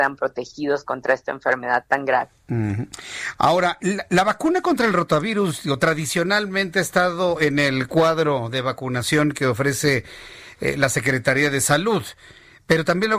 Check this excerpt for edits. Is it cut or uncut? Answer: cut